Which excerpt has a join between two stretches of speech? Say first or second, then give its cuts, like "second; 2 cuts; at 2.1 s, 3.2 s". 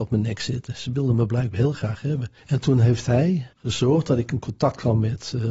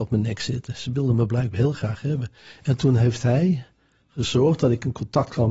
first; 2 cuts; at 2.4 s, 3.5 s